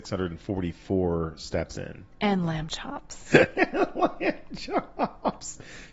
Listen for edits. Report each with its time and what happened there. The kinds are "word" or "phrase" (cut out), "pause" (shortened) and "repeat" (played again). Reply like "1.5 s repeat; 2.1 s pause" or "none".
none